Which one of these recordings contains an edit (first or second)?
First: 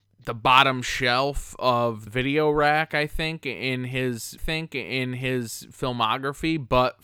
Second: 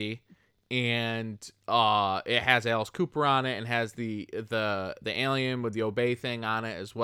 first